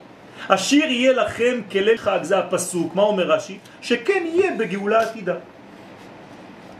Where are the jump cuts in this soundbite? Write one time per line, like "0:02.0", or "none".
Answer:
0:02.0